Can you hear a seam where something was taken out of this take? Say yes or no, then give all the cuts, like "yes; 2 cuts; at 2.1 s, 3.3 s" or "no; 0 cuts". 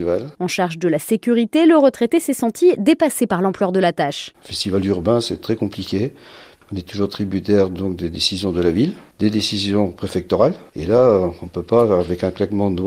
no; 0 cuts